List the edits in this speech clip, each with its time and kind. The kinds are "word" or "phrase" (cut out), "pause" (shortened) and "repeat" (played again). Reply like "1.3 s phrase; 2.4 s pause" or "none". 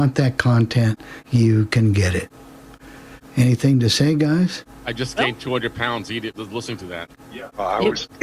3.3 s pause